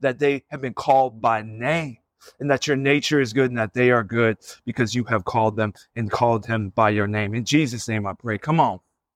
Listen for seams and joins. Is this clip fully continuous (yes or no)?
yes